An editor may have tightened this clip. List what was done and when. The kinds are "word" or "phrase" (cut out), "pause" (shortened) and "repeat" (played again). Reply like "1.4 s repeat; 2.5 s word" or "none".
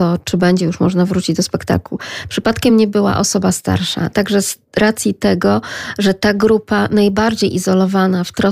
none